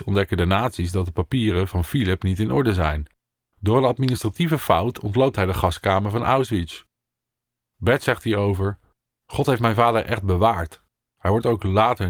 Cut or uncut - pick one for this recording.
uncut